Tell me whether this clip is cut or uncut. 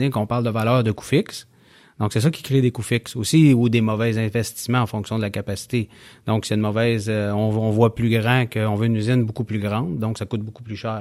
uncut